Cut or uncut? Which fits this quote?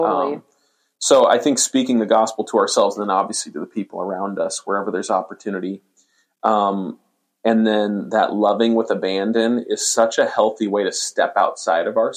uncut